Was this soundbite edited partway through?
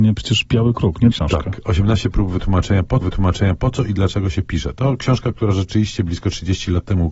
yes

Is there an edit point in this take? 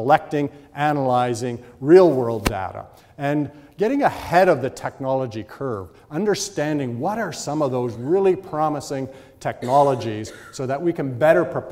no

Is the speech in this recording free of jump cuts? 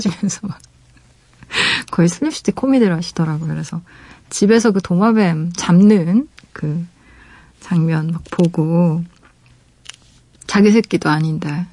no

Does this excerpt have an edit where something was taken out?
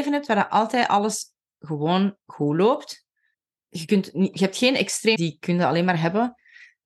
yes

